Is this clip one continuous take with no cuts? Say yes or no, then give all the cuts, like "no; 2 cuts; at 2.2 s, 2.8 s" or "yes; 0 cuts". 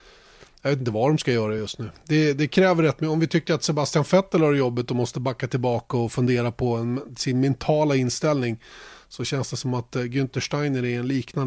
yes; 0 cuts